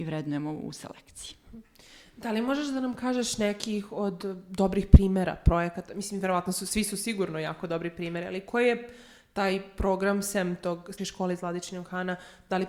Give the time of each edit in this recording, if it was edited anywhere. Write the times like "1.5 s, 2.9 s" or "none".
11.0 s

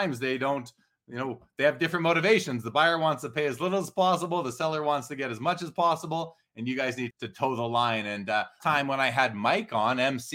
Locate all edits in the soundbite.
7.1 s, 8.6 s

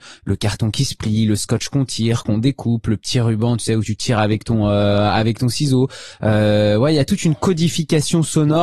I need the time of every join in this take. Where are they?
none

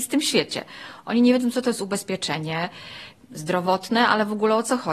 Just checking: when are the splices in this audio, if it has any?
none

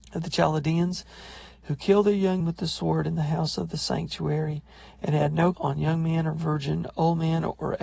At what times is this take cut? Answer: 2.4 s, 5.5 s

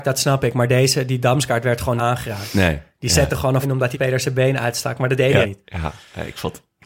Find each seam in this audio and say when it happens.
2.0 s, 3.6 s, 3.9 s, 5.4 s

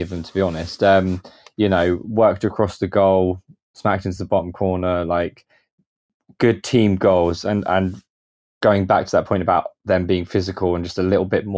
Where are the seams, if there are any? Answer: none

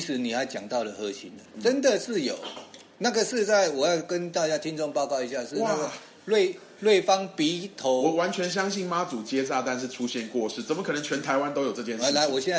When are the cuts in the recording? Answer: none

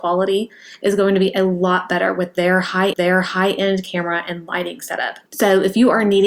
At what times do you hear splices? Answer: 2.9 s, 5.3 s

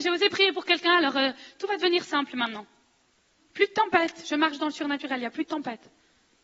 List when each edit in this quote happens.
none

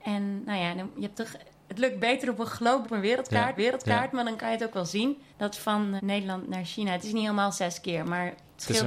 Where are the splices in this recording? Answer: 2.8 s, 3.6 s, 5.3 s, 6.0 s

